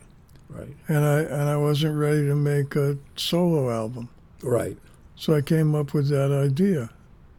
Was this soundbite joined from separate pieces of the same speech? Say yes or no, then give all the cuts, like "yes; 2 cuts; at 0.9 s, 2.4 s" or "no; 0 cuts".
no; 0 cuts